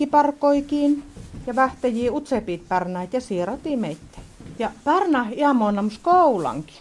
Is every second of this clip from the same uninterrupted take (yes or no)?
yes